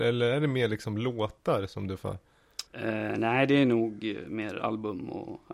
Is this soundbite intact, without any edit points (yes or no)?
no